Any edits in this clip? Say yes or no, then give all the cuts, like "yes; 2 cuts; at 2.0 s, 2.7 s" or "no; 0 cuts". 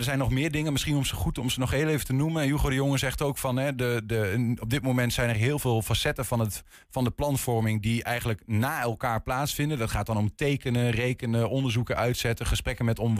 no; 0 cuts